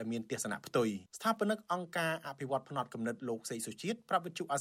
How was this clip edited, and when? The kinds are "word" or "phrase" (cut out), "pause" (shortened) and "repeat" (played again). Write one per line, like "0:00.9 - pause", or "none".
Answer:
0:01.1 - pause